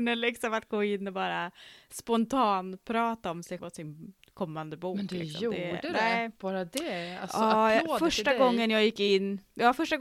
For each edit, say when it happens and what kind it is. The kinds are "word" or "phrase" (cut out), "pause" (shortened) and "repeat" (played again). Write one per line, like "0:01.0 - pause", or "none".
0:03.6 - word